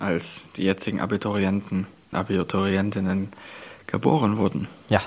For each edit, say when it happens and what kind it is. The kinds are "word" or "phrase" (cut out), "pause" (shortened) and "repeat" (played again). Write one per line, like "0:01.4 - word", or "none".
0:02.1 - word